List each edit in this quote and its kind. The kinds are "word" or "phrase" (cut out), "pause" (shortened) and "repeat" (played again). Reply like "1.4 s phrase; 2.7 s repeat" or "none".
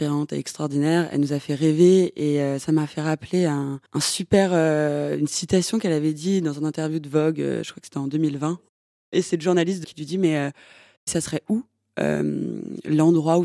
3.9 s pause; 9.8 s phrase